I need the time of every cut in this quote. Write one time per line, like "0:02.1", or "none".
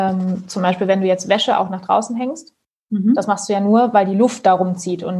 none

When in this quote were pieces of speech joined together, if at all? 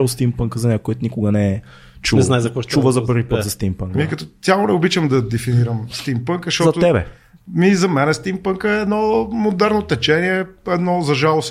none

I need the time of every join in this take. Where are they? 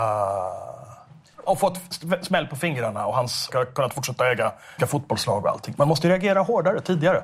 0:01.5
0:03.5
0:04.8

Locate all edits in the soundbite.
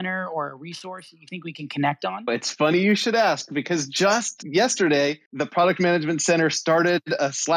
0:05.2

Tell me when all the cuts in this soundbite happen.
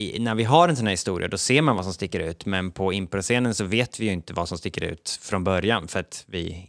none

